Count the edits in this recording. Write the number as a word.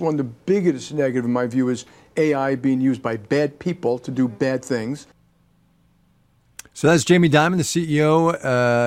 zero